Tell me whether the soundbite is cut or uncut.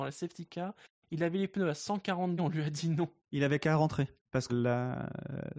cut